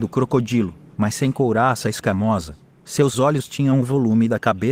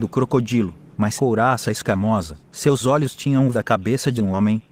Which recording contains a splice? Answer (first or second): second